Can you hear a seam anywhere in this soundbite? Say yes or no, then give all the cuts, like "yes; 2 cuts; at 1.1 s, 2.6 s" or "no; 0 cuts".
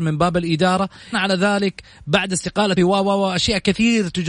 yes; 2 cuts; at 1.1 s, 2.8 s